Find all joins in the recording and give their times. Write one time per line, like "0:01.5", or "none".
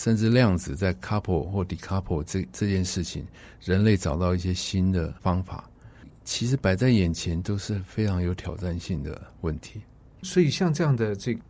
none